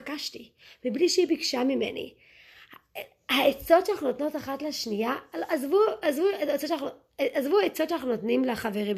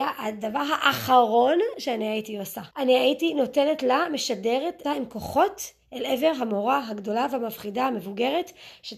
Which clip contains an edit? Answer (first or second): second